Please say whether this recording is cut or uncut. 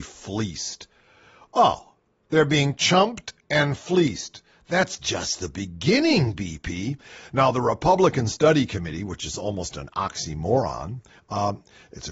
uncut